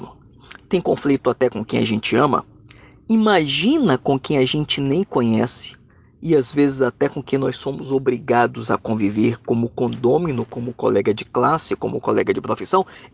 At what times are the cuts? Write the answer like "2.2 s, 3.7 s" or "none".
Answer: none